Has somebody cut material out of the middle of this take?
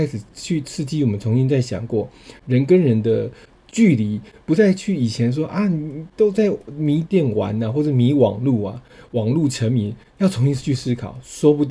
no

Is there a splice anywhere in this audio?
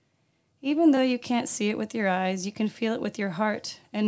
no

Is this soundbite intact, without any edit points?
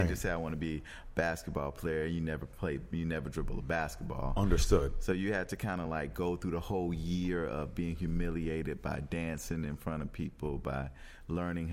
yes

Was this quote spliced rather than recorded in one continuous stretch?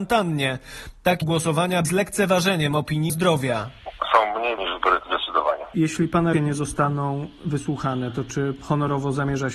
yes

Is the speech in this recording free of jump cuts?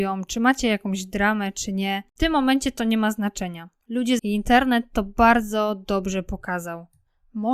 no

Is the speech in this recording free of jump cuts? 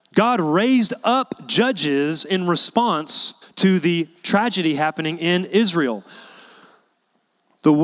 no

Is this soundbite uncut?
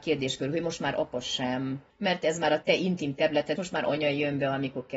no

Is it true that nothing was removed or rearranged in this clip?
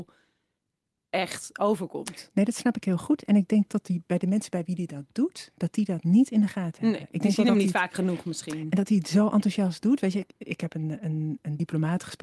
no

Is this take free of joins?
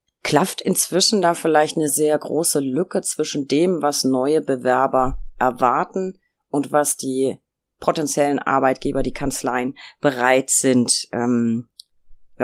no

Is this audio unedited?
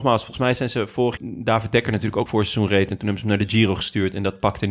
no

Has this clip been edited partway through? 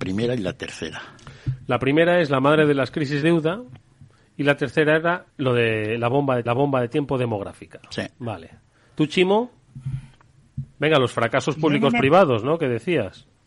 yes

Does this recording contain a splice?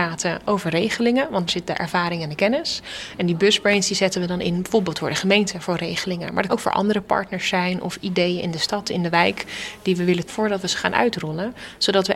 yes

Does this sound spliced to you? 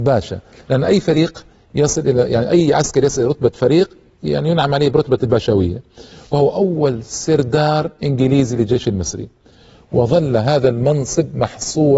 no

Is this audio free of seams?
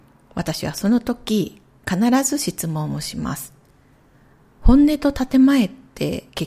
yes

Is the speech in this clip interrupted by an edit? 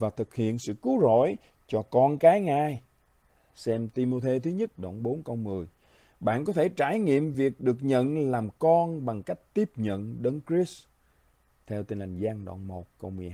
no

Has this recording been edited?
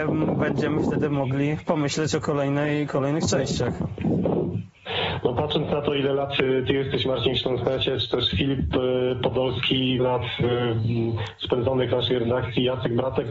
yes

